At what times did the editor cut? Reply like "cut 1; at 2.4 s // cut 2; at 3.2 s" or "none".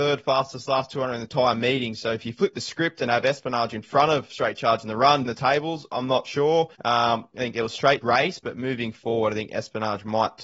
cut 1; at 5.2 s // cut 2; at 6.7 s // cut 3; at 8.0 s